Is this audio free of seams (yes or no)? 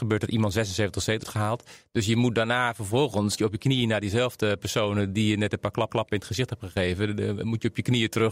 no